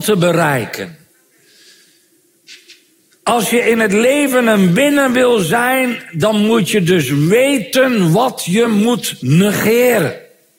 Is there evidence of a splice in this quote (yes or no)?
no